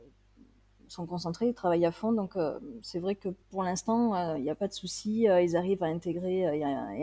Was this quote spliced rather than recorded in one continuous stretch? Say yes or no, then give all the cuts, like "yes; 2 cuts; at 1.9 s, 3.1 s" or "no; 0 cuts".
yes; 1 cut; at 3.4 s